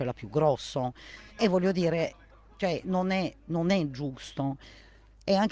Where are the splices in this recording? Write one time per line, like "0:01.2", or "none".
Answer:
0:01.3
0:02.8